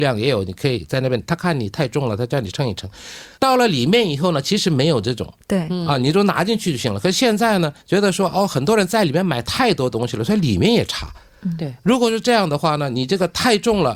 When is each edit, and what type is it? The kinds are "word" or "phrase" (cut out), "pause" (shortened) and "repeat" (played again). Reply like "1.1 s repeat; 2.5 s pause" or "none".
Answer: 3.3 s pause; 7.8 s pause